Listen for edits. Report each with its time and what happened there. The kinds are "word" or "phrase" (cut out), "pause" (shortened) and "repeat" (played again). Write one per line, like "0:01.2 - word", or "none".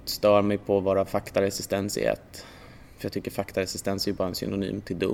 none